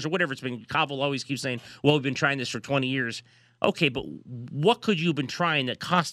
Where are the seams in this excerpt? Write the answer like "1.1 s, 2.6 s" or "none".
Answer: none